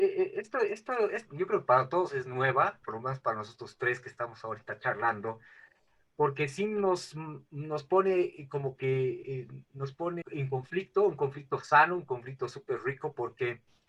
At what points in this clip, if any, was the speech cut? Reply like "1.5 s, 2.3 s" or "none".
1.3 s, 2.8 s, 9.2 s, 10.2 s